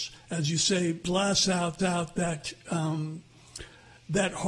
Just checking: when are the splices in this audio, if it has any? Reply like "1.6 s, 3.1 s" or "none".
1.0 s, 1.8 s